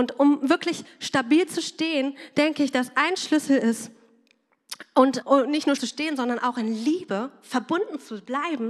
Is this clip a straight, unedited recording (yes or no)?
no